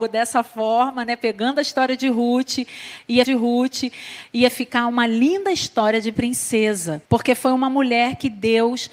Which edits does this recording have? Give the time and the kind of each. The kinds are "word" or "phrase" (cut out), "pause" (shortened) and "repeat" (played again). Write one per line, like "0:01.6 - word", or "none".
0:03.2 - repeat
0:07.0 - pause